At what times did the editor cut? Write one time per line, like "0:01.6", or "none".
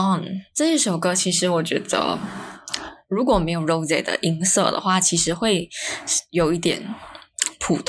none